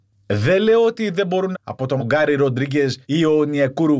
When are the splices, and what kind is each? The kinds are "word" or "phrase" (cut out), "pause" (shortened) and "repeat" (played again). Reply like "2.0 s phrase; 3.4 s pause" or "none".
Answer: 1.5 s phrase; 2.0 s word; 3.0 s pause

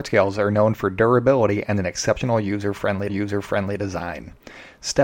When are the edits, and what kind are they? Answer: 3.1 s repeat

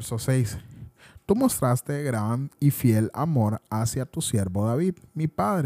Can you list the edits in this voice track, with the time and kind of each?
none

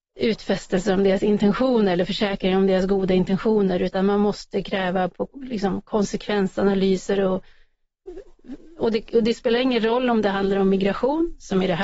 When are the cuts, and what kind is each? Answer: none

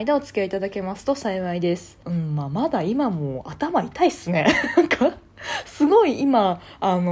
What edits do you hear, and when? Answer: 2.0 s pause

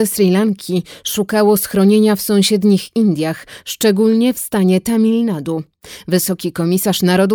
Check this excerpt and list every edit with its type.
none

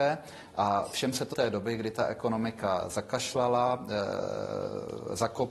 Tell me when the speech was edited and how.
1.3 s phrase

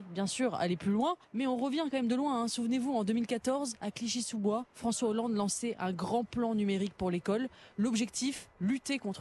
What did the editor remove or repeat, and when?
1.2 s pause; 4.7 s pause

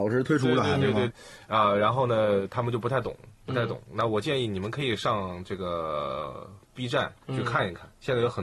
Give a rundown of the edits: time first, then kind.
1.1 s word; 7.2 s pause

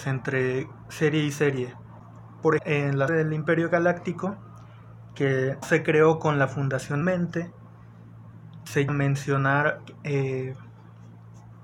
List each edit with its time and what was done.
2.6 s word; 3.1 s word; 5.6 s word; 7.0 s word; 8.9 s word

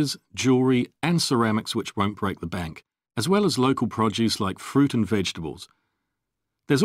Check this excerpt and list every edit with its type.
3.1 s pause

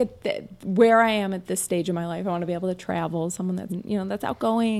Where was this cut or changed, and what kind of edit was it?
3.7 s word

